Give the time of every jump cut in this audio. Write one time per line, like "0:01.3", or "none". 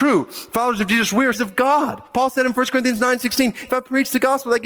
0:01.3
0:02.1